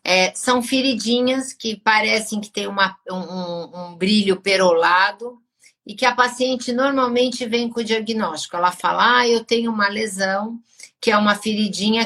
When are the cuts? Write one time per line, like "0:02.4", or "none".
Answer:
none